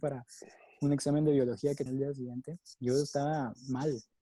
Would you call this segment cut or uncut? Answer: cut